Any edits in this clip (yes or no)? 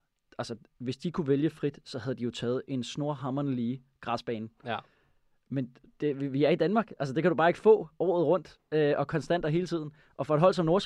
no